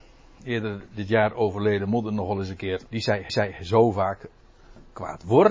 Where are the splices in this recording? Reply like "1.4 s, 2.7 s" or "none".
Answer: 2.9 s, 3.3 s